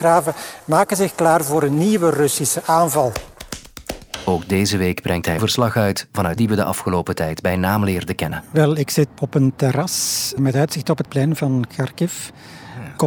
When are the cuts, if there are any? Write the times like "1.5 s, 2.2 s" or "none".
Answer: 5.4 s, 6.4 s, 9.2 s, 10.4 s, 11.1 s